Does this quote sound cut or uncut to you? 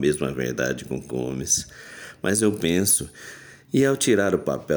cut